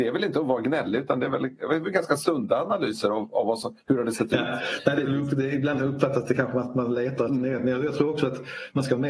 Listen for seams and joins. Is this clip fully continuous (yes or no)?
yes